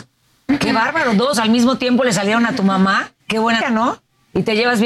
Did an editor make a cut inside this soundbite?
yes; 3 cuts; at 1.3 s, 3.2 s, 3.6 s

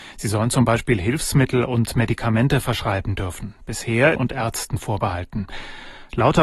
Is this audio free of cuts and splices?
no; 1 cut; at 4.1 s

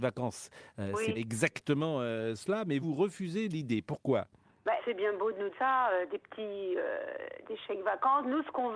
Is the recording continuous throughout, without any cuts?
no; 4 cuts; at 1.1 s, 2.8 s, 4.8 s, 5.5 s

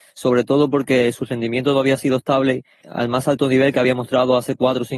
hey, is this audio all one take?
no; 1 cut; at 2.8 s

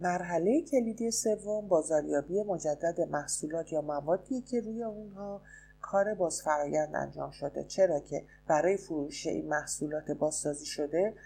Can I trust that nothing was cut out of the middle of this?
yes; 0 cuts

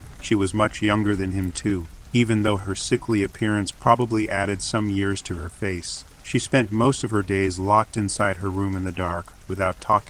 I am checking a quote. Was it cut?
yes; 1 cut; at 6.1 s

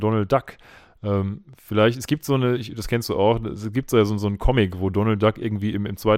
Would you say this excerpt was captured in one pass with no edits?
yes; 0 cuts

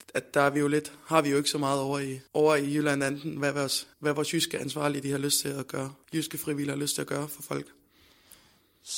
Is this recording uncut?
no; 3 cuts; at 2.3 s, 3.9 s, 6.0 s

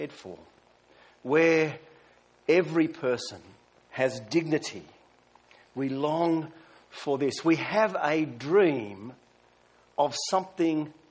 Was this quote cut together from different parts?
no; 0 cuts

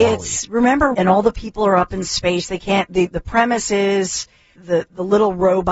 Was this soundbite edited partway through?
yes; 2 cuts; at 0.9 s, 4.6 s

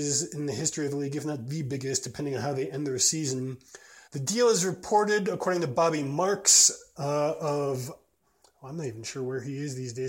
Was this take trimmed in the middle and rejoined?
yes; 1 cut; at 4.1 s

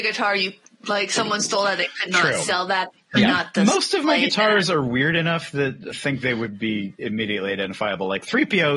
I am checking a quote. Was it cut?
yes; 1 cut; at 5.9 s

